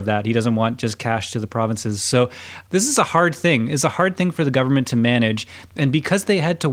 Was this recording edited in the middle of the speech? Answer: no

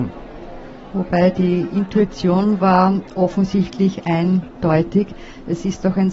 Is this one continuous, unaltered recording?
yes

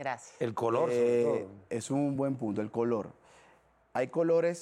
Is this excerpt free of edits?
yes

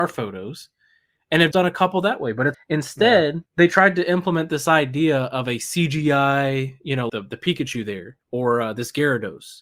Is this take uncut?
no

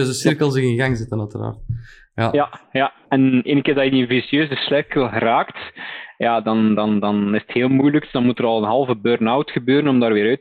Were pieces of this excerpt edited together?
no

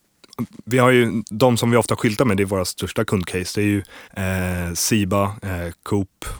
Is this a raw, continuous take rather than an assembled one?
no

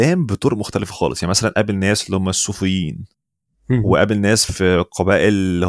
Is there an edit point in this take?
no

